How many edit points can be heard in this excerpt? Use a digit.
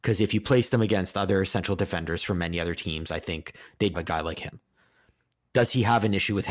1